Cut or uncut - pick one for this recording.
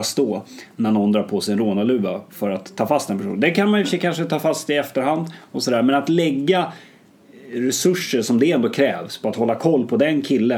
uncut